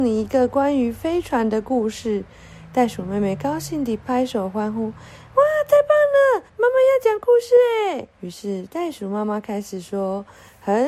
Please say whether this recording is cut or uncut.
cut